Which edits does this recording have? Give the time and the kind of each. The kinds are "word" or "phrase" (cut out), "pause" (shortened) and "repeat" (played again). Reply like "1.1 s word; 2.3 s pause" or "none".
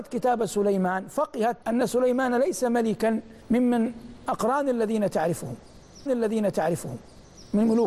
1.6 s pause; 3.4 s pause; 6.1 s repeat